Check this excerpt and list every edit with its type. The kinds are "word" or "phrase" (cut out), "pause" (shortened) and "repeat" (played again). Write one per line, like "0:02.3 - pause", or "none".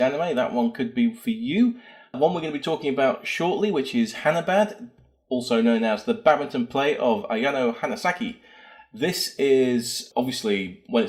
none